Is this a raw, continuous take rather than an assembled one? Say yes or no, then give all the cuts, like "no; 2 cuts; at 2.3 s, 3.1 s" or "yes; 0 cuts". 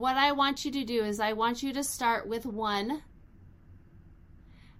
yes; 0 cuts